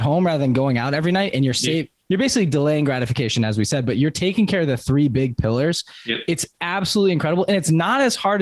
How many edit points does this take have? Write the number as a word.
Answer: zero